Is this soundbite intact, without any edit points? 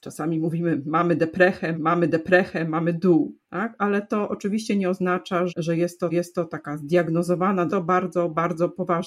no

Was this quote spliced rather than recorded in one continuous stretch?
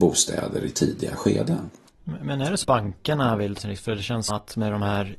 yes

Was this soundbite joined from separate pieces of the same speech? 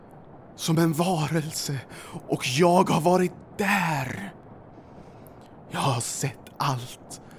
no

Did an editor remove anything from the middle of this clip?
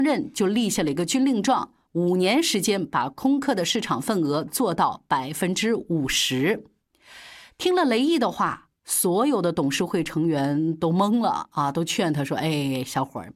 no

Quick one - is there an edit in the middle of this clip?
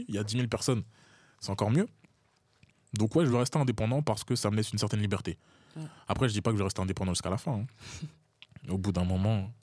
no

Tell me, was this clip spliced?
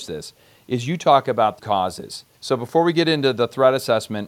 yes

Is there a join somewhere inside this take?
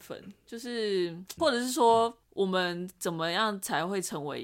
yes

